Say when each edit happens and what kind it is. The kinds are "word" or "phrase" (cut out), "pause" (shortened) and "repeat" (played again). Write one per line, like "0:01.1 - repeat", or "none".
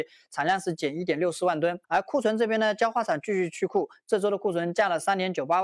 0:01.8 - pause